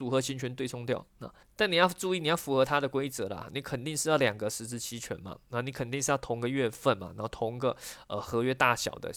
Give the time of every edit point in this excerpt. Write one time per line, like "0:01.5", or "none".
0:01.1
0:01.4